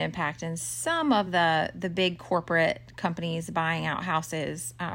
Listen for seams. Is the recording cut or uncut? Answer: uncut